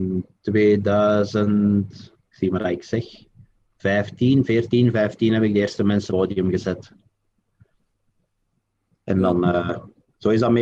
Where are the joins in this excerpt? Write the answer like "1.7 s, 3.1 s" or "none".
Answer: 2.3 s, 6.1 s